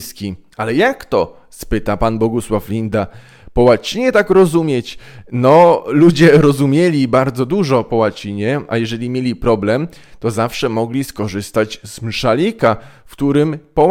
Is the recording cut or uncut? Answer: uncut